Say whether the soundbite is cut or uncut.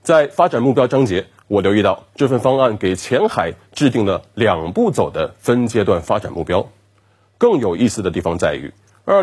uncut